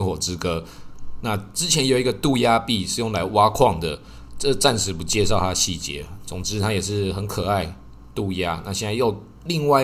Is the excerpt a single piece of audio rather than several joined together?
yes; 0 cuts

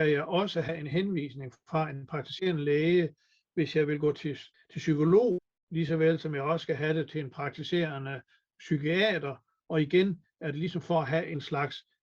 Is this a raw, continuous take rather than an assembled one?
yes; 0 cuts

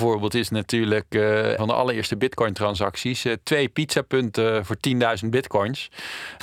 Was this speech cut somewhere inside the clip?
yes; 1 cut; at 1.6 s

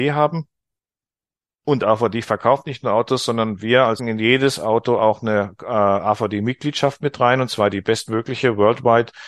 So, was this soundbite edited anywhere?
yes; 1 cut; at 4.0 s

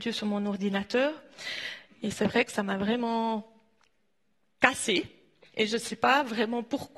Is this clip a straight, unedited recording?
yes; 0 cuts

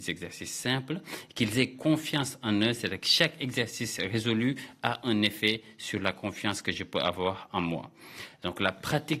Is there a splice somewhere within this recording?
no; 0 cuts

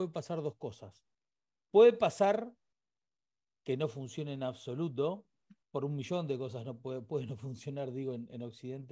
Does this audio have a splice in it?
no; 0 cuts

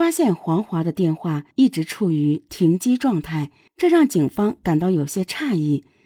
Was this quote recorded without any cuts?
no; 2 cuts; at 1.5 s, 3.7 s

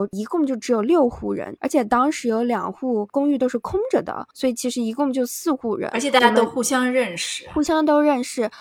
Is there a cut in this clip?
yes; 2 cuts; at 1.6 s, 4.3 s

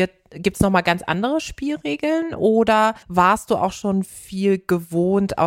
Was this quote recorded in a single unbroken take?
no; 1 cut; at 3.0 s

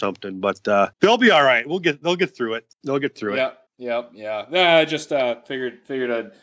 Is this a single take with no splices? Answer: no; 3 cuts; at 0.9 s, 2.7 s, 3.7 s

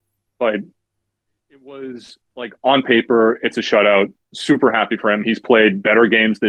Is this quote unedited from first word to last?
no; 1 cut; at 2.3 s

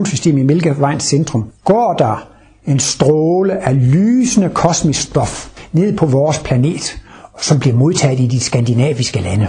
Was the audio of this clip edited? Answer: yes; 1 cut; at 1.6 s

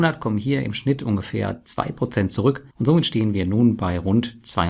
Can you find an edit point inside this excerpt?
yes; 1 cut; at 2.7 s

